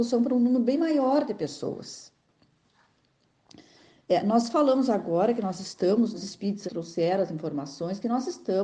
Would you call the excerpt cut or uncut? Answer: cut